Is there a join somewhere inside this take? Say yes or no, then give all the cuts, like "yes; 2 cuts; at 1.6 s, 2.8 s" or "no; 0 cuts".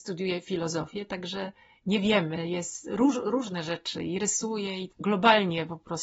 no; 0 cuts